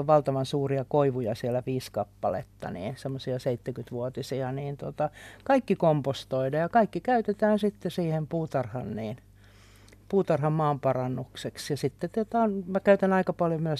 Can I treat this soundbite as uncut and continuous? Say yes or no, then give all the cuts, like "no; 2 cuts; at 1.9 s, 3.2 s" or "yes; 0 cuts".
yes; 0 cuts